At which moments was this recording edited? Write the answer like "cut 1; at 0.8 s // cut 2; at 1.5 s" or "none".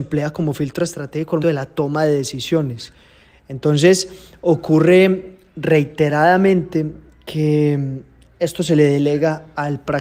cut 1; at 1.4 s